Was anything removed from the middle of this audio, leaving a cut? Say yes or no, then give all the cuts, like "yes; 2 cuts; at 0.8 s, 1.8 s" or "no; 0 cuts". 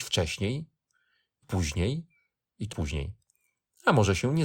yes; 2 cuts; at 1.4 s, 2.7 s